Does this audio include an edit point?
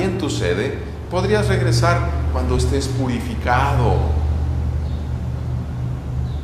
no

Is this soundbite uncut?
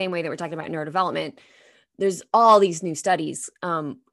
yes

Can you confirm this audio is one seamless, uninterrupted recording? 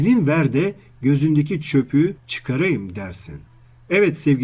yes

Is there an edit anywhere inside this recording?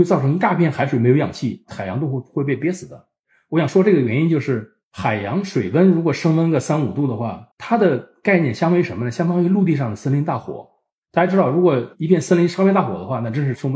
yes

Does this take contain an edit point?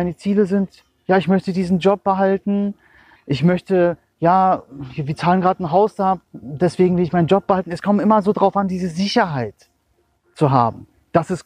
yes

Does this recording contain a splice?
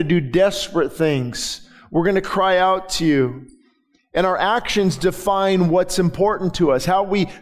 no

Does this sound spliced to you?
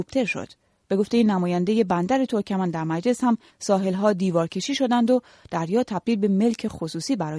no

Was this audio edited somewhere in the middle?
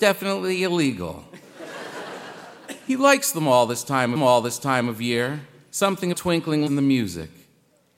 yes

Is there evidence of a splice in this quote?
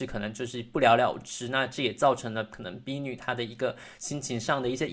no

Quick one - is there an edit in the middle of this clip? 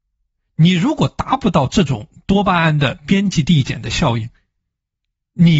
no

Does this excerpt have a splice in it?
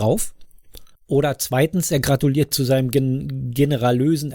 yes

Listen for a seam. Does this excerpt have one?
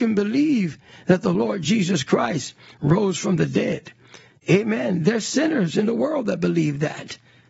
no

